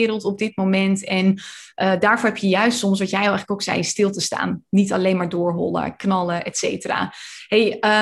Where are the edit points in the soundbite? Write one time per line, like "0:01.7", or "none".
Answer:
none